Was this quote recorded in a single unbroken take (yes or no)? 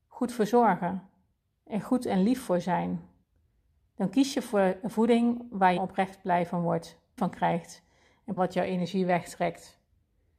no